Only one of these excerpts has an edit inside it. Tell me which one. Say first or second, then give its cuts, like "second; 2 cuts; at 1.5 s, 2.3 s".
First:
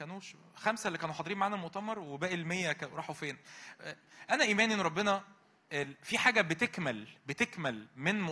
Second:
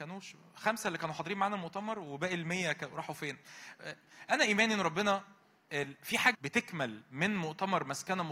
second; 1 cut; at 6.3 s